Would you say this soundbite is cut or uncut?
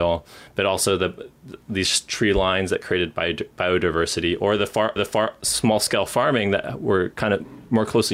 cut